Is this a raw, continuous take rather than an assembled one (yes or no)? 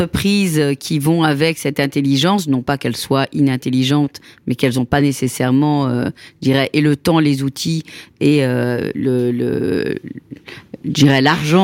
yes